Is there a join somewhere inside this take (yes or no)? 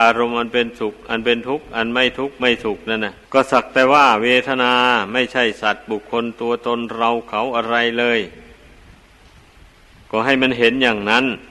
yes